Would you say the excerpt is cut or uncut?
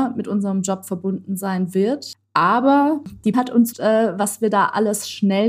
cut